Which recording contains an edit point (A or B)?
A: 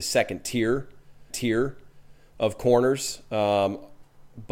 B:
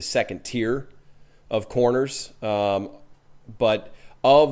A